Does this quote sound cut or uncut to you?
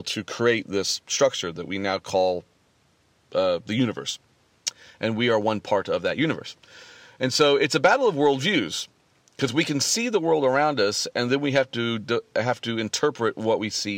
uncut